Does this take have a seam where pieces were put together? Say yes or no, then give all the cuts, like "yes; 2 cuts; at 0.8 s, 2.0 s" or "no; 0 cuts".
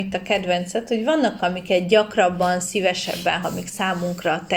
yes; 2 cuts; at 1.4 s, 3.4 s